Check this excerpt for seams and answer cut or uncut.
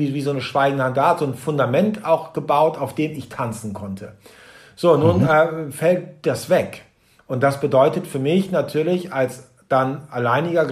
uncut